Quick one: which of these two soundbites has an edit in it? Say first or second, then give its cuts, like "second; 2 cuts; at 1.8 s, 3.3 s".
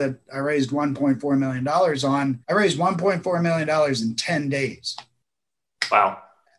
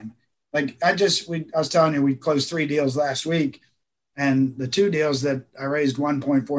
first; 1 cut; at 2.4 s